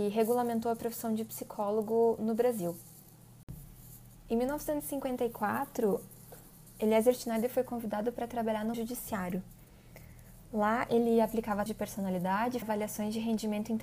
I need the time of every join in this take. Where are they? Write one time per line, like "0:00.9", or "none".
0:08.7
0:11.7
0:12.6